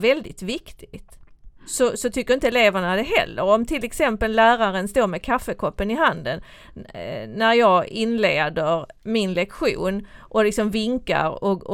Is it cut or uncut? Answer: cut